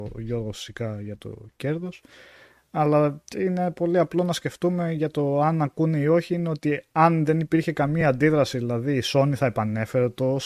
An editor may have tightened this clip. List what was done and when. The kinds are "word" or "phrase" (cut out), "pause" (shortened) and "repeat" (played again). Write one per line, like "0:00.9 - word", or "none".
none